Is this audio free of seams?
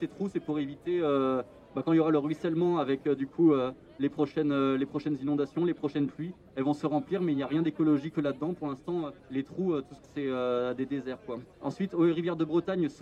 no; 3 cuts; at 9.2 s, 10.0 s, 11.5 s

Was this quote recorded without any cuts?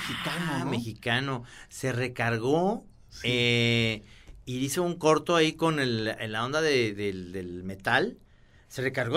yes; 0 cuts

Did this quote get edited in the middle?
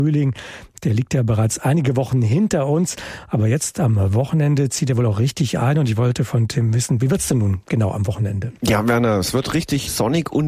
yes; 1 cut; at 8.6 s

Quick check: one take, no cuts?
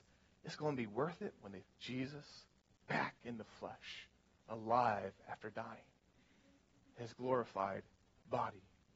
no; 1 cut; at 1.6 s

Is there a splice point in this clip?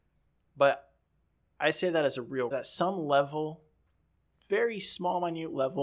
yes; 1 cut; at 2.5 s

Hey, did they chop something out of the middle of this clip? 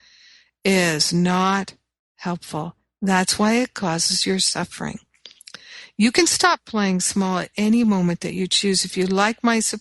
no; 0 cuts

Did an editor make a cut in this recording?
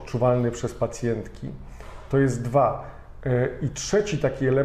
no; 0 cuts

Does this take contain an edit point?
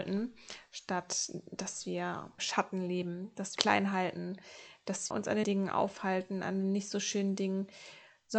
yes; 4 cuts; at 2.4 s, 3.6 s, 5.1 s, 5.4 s

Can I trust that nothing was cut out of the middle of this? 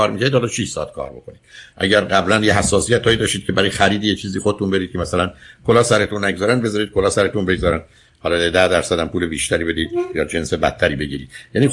yes; 0 cuts

